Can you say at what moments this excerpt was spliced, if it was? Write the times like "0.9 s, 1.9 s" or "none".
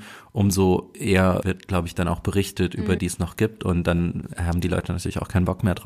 1.4 s, 3.0 s